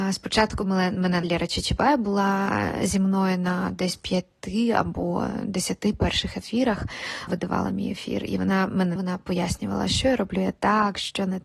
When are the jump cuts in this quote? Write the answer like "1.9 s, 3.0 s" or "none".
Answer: 1.2 s, 7.3 s, 9.0 s